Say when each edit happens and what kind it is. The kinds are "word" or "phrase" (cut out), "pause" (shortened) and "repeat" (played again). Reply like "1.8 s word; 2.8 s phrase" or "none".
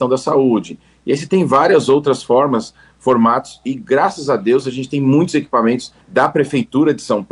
6.0 s pause